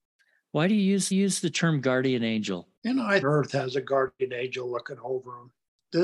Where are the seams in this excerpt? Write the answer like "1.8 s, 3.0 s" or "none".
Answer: 1.1 s, 2.8 s, 3.2 s

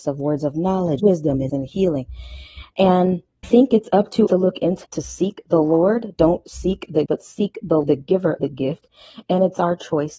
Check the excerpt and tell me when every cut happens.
1.0 s, 1.5 s, 3.4 s, 4.3 s, 4.8 s, 7.1 s, 7.8 s, 8.4 s

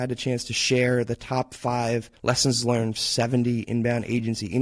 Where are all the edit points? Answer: 2.2 s, 3.0 s

